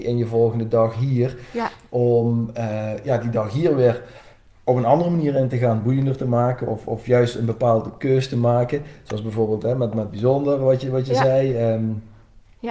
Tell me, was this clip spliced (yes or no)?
no